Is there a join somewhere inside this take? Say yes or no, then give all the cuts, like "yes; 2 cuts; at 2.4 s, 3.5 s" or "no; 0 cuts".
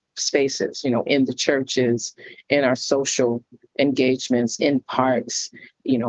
no; 0 cuts